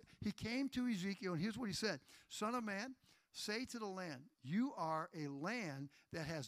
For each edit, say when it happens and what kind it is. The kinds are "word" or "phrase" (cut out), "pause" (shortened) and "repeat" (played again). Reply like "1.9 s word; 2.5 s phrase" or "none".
4.3 s pause